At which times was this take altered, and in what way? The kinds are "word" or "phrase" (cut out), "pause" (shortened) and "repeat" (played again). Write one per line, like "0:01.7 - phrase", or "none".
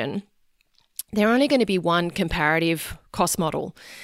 none